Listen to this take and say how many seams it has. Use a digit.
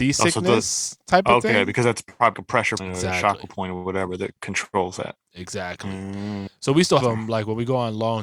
4